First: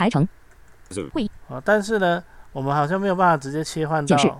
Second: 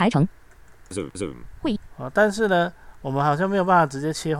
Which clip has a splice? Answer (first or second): first